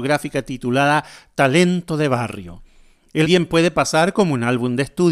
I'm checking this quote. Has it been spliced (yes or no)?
yes